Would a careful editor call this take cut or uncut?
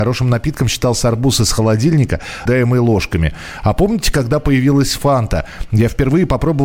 cut